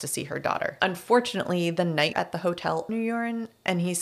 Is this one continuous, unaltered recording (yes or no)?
no